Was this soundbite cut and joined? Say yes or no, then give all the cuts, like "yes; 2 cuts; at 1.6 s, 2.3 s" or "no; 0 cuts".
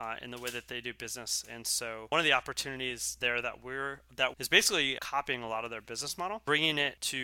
yes; 2 cuts; at 4.3 s, 5.0 s